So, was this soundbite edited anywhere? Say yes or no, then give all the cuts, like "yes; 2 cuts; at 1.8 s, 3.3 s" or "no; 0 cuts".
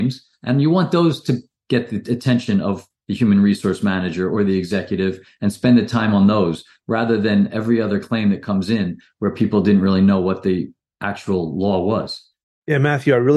no; 0 cuts